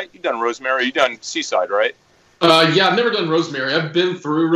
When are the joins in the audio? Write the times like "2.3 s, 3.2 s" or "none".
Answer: none